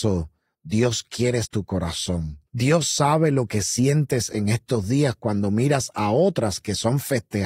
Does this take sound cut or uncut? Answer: cut